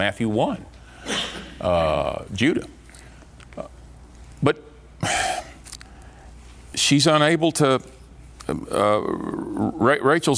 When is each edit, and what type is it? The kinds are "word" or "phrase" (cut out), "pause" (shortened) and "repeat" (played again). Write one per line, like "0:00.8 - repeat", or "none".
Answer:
none